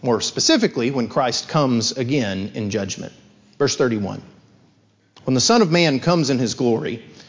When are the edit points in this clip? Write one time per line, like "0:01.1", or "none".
none